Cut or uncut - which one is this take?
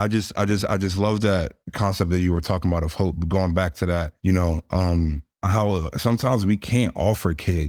cut